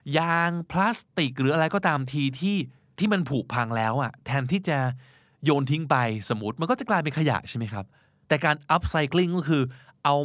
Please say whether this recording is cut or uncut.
uncut